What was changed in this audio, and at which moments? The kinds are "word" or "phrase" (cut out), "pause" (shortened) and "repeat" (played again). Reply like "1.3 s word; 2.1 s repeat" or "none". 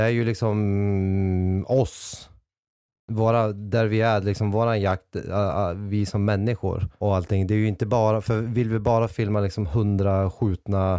7.0 s word